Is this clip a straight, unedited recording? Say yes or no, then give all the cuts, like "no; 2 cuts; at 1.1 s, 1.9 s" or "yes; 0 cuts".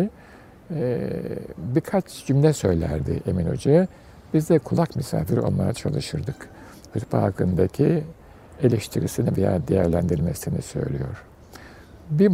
yes; 0 cuts